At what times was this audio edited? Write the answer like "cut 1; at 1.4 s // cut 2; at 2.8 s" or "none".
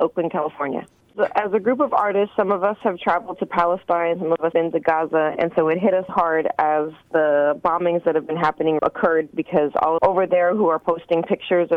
cut 1; at 4.5 s // cut 2; at 6.1 s // cut 3; at 8.8 s // cut 4; at 10.0 s